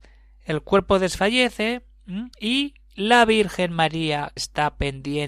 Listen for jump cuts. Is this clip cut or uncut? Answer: cut